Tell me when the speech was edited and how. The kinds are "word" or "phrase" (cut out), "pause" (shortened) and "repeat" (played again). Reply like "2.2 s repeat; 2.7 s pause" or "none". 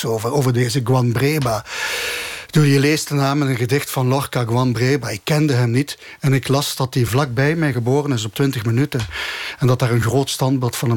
none